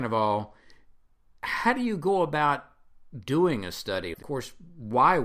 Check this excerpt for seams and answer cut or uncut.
cut